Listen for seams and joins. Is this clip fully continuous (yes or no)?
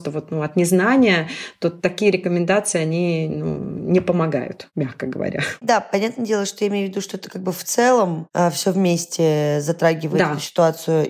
yes